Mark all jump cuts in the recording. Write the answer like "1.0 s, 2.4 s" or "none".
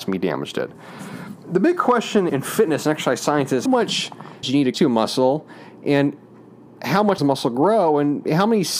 2.3 s, 3.7 s, 4.4 s, 4.7 s, 7.2 s